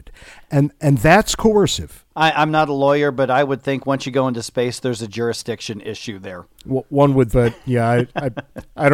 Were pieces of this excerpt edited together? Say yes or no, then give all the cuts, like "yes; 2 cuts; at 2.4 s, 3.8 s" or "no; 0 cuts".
yes; 3 cuts; at 2.1 s, 6.5 s, 7.3 s